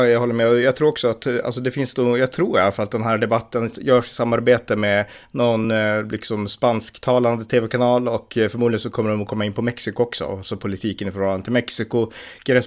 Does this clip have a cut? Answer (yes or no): no